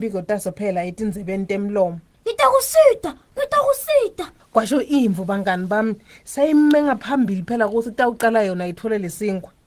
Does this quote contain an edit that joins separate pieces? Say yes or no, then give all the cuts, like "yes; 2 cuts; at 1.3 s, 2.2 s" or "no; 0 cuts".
no; 0 cuts